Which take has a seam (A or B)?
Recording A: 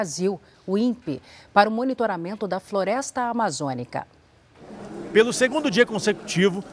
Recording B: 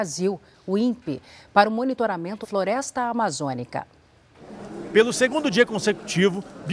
B